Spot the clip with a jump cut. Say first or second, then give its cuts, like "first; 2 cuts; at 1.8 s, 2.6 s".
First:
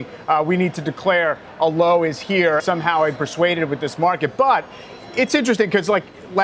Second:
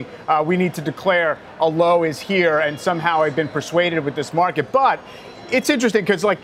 first; 2 cuts; at 2.6 s, 3.2 s